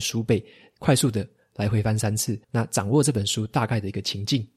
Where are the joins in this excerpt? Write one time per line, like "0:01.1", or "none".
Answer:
0:02.4